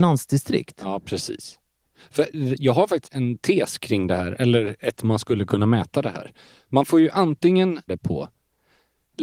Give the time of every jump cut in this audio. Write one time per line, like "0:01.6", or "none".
0:03.0
0:05.0
0:07.9